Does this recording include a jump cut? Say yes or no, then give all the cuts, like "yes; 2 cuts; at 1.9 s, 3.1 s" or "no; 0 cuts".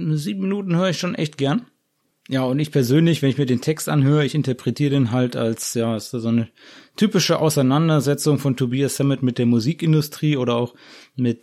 no; 0 cuts